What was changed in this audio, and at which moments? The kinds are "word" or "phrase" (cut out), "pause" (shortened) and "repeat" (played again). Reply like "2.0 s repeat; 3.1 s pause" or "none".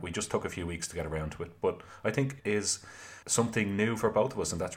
2.4 s word; 3.2 s pause